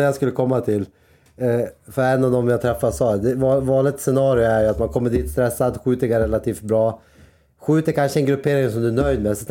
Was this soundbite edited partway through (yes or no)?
no